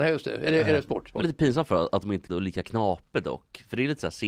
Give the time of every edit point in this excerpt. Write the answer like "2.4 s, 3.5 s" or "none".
1.2 s, 2.3 s